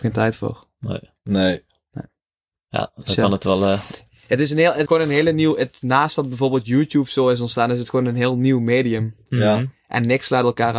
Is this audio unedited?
no; 2 cuts; at 4.9 s, 5.8 s

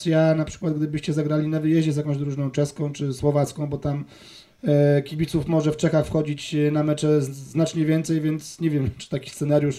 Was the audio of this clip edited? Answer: no; 0 cuts

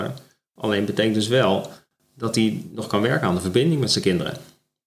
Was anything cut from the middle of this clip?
no; 0 cuts

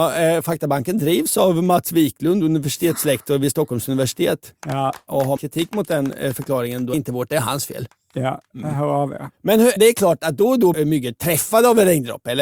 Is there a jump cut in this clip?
yes; 5 cuts; at 5.4 s, 6.9 s, 9.3 s, 9.8 s, 10.7 s

